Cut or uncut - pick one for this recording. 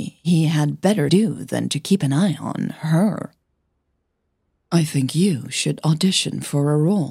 cut